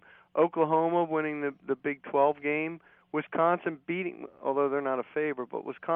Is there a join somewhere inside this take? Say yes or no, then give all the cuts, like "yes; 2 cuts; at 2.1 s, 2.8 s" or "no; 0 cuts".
no; 0 cuts